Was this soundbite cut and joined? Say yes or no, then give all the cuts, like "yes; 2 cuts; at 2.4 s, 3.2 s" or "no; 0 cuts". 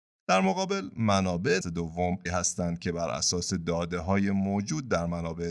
yes; 2 cuts; at 1.6 s, 2.3 s